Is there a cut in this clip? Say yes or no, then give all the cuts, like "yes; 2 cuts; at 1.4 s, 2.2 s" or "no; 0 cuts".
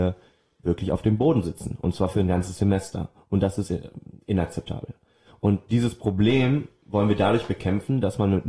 no; 0 cuts